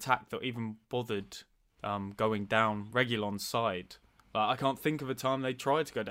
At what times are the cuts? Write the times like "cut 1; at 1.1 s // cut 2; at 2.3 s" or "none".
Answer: none

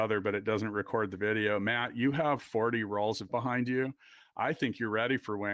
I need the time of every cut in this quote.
cut 1; at 2.4 s // cut 2; at 3.3 s

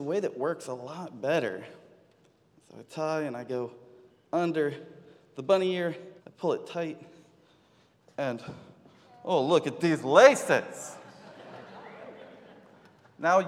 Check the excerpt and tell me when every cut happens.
cut 1; at 6.2 s

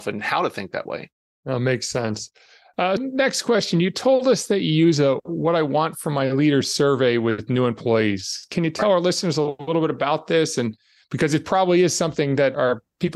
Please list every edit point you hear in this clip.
cut 1; at 3.0 s

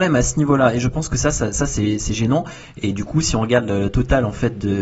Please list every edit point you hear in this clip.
none

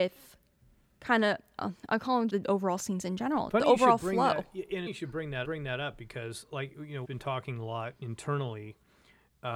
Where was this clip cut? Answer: cut 1; at 2.3 s // cut 2; at 3.5 s // cut 3; at 4.9 s // cut 4; at 5.4 s // cut 5; at 7.0 s

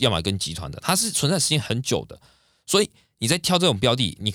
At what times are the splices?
none

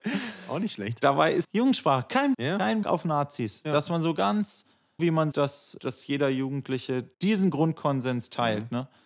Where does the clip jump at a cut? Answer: cut 1; at 1.4 s // cut 2; at 2.3 s // cut 3; at 2.8 s // cut 4; at 5.0 s // cut 5; at 5.3 s // cut 6; at 5.8 s // cut 7; at 7.1 s

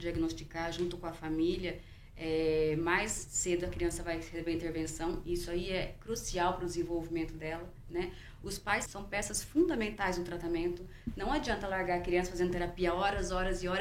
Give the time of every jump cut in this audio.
cut 1; at 8.9 s

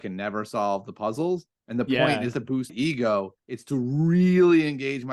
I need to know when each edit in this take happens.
cut 1; at 1.5 s // cut 2; at 2.3 s // cut 3; at 2.7 s // cut 4; at 3.4 s

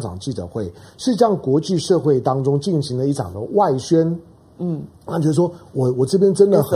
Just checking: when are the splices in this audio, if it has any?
none

